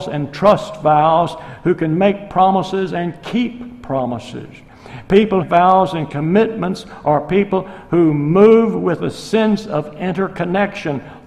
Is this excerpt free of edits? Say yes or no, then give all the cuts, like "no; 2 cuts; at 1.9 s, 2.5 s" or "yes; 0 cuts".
no; 1 cut; at 5.4 s